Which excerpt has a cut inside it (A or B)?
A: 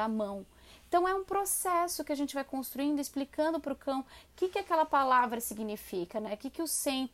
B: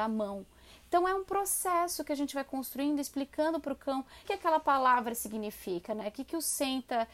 B